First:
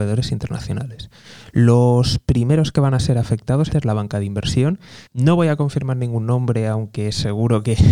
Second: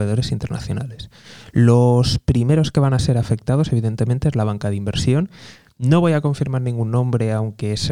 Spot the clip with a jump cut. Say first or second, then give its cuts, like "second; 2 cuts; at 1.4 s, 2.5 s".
first; 2 cuts; at 3.7 s, 5.1 s